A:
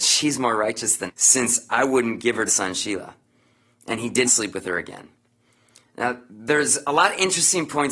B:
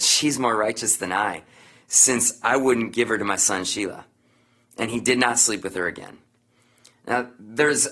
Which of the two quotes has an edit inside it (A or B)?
A